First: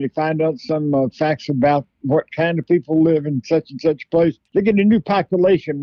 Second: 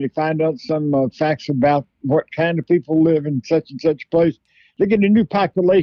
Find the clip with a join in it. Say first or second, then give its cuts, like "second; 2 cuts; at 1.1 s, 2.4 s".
first; 1 cut; at 4.5 s